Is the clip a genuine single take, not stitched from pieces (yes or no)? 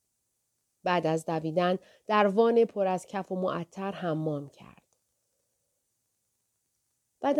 yes